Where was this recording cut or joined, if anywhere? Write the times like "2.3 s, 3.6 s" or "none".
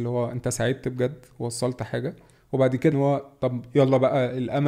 2.9 s